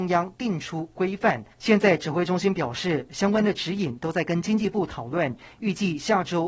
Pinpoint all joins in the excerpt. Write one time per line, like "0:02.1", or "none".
0:01.5